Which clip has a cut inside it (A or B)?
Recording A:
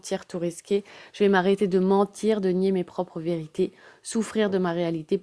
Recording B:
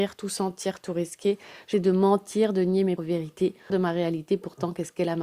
B